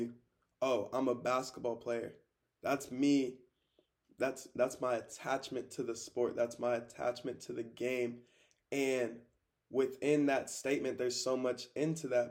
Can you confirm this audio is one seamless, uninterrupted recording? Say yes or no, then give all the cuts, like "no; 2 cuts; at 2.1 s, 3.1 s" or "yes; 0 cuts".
yes; 0 cuts